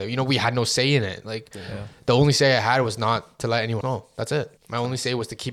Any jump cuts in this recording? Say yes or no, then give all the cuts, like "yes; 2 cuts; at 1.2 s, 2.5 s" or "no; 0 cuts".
yes; 2 cuts; at 3.8 s, 4.6 s